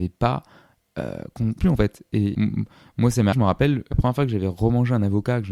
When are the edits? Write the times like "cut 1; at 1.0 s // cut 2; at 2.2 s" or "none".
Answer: cut 1; at 1.6 s // cut 2; at 2.3 s // cut 3; at 3.3 s // cut 4; at 3.9 s